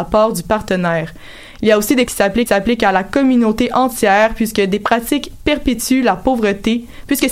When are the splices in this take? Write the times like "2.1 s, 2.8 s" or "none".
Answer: 2.1 s, 2.5 s